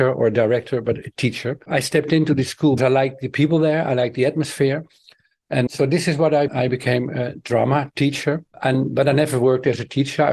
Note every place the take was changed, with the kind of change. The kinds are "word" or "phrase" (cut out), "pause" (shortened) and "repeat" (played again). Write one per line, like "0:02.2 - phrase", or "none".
0:02.8 - word
0:05.7 - word
0:06.5 - word